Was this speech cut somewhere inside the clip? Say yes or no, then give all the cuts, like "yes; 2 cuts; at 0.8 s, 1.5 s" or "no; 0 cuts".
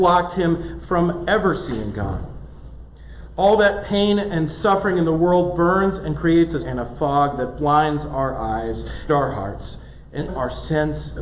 yes; 3 cuts; at 6.6 s, 9.1 s, 10.3 s